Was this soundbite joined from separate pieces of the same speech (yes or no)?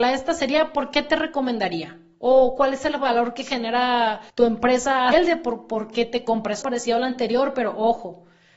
yes